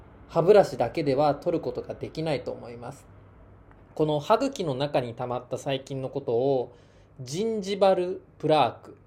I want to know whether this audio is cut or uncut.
uncut